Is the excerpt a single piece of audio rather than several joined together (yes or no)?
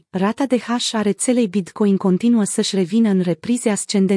yes